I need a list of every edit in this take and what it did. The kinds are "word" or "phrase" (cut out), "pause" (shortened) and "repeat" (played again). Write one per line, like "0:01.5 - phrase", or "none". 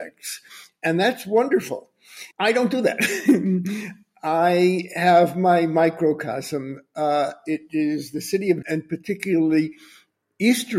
0:02.3 - pause
0:08.6 - word